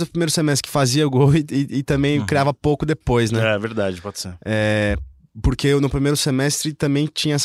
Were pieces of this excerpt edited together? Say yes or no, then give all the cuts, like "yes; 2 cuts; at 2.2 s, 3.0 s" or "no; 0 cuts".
no; 0 cuts